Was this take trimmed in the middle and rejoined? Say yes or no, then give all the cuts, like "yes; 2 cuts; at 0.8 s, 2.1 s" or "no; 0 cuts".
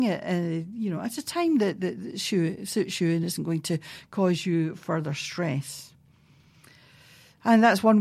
no; 0 cuts